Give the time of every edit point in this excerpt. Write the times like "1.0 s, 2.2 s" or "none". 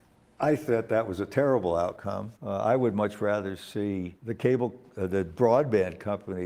2.4 s, 4.2 s

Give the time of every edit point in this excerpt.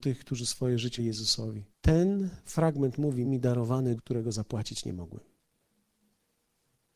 1.0 s, 1.7 s, 3.2 s, 4.0 s

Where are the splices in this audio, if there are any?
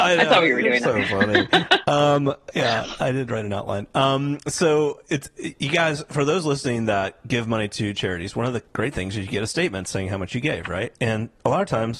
8.7 s, 11.0 s

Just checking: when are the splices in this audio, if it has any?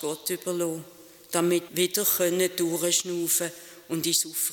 1.7 s

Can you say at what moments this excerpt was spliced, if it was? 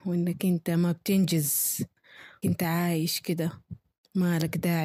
2.4 s

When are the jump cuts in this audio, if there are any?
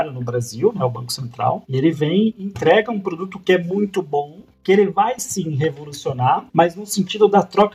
6.5 s

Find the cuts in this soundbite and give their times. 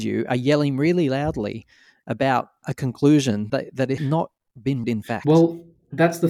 2.6 s, 3.5 s, 4.0 s, 4.8 s

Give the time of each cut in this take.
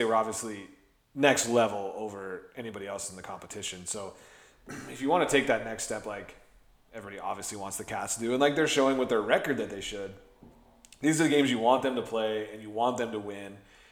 none

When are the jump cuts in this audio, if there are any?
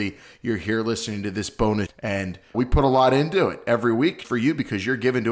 1.9 s, 2.5 s, 4.2 s

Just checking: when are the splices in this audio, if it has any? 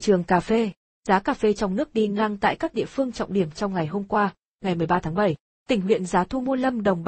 none

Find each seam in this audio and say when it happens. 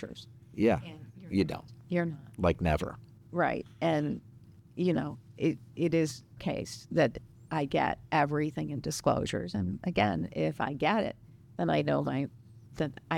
6.4 s

